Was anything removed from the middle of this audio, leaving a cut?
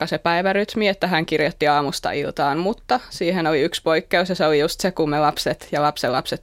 no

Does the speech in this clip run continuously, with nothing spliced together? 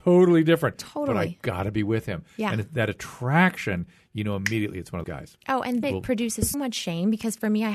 no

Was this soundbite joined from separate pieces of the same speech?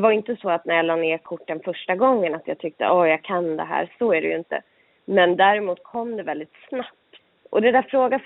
no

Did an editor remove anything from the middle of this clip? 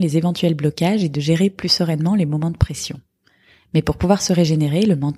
no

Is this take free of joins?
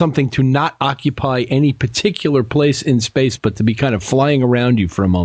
yes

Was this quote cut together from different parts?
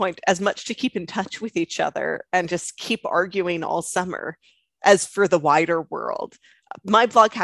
no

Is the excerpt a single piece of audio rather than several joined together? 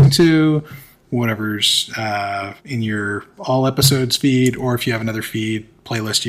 no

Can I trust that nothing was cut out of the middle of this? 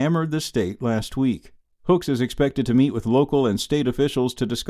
yes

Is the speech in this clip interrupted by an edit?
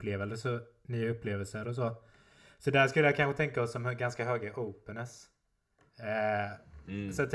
no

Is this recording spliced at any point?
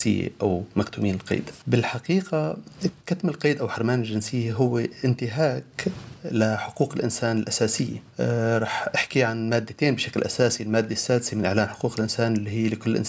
no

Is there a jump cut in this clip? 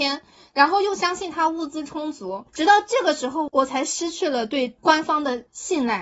yes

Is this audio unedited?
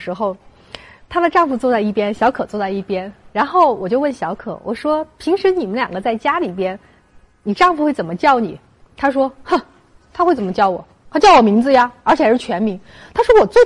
yes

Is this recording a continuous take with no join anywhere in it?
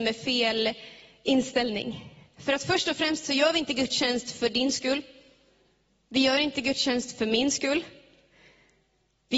yes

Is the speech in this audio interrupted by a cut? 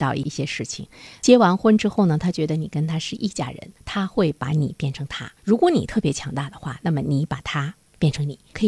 yes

